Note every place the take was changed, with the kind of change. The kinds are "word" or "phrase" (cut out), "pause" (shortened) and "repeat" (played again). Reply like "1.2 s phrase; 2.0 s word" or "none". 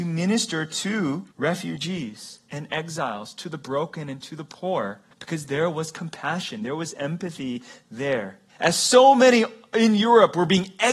1.3 s pause; 5.1 s pause; 8.5 s pause